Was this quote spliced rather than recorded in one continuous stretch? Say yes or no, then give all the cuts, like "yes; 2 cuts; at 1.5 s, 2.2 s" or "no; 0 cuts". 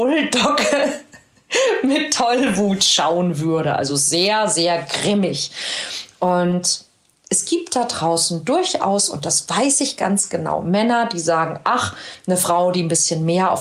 no; 0 cuts